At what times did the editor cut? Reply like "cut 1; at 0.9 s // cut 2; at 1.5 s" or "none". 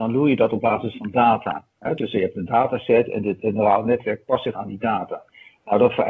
cut 1; at 4.5 s